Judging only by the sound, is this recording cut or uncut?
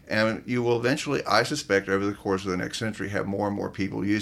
uncut